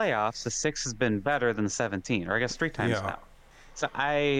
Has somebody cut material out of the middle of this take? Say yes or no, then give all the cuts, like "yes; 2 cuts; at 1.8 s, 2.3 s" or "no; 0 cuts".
no; 0 cuts